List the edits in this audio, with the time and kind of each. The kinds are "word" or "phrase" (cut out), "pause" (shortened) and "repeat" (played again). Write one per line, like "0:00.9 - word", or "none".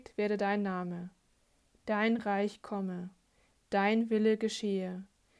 none